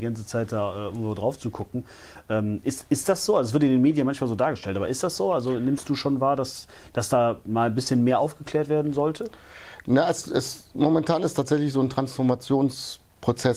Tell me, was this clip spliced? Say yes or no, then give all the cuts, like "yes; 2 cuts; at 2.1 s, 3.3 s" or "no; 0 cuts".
no; 0 cuts